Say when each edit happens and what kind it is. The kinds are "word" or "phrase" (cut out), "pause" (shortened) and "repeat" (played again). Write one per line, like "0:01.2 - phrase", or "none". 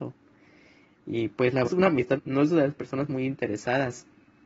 0:01.6 - word
0:02.2 - phrase